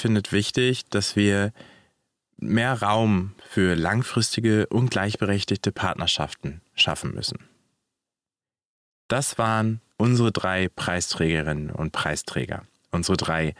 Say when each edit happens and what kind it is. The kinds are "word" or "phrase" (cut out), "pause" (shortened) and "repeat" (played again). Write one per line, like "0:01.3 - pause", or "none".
0:09.9 - pause